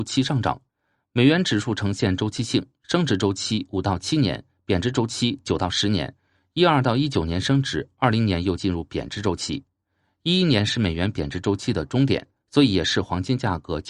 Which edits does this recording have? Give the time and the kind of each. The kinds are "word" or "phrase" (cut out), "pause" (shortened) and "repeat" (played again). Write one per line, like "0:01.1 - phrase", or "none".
none